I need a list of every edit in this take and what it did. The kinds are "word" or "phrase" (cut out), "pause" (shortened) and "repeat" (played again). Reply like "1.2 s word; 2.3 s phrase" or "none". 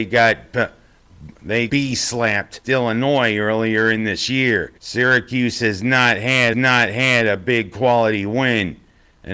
1.7 s word; 2.6 s word; 4.8 s pause; 6.5 s repeat